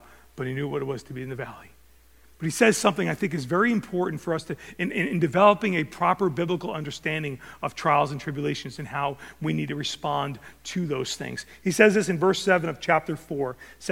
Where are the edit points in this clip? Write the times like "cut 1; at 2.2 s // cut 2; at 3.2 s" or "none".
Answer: none